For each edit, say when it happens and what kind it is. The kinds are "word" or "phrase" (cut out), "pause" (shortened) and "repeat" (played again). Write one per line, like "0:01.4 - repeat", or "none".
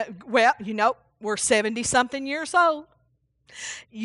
none